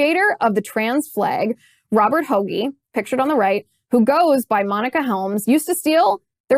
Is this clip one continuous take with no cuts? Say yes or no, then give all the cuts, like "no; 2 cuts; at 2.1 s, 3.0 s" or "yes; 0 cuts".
yes; 0 cuts